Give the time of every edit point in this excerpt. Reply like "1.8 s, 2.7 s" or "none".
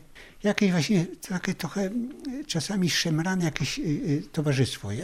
none